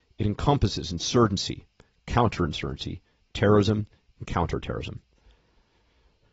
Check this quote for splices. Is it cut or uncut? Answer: uncut